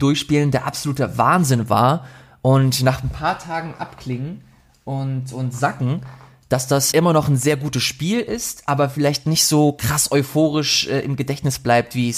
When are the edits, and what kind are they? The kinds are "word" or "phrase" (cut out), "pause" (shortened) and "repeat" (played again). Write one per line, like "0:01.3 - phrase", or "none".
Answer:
0:06.9 - word